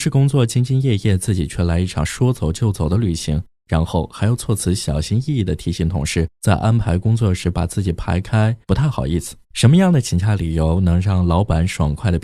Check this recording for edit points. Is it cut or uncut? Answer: cut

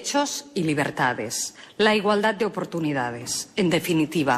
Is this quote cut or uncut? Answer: uncut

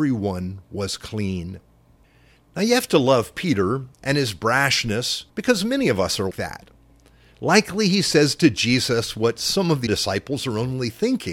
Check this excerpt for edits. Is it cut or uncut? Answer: cut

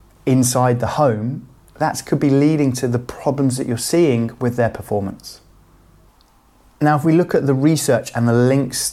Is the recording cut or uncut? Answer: uncut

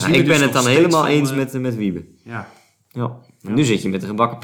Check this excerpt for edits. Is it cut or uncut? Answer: uncut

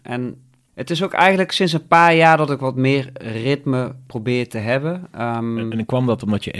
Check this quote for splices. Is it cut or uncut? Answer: uncut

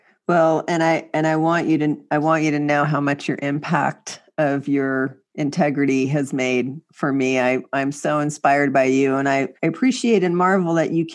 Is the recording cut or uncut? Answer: cut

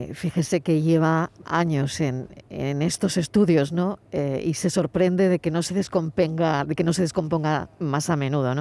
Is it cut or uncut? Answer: cut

